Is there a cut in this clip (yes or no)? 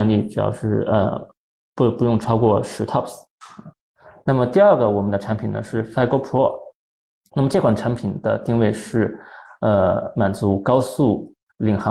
no